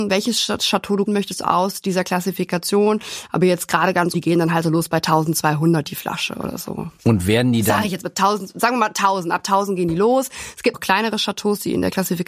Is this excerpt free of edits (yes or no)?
no